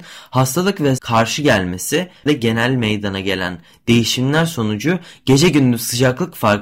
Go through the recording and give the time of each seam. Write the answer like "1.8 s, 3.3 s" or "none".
1.0 s, 2.3 s